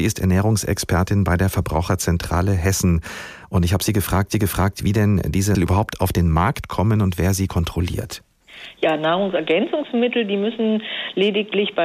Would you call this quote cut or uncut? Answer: cut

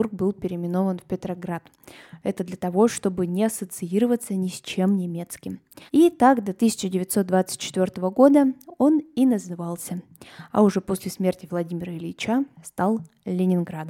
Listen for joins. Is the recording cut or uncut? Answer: cut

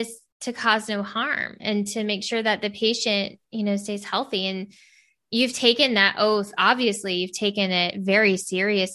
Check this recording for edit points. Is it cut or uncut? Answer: uncut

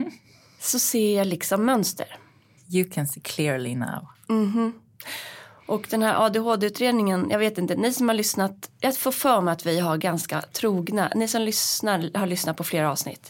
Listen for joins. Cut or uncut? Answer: uncut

